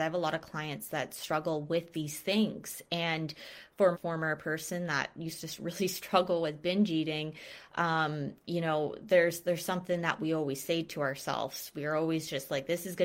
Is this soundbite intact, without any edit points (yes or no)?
no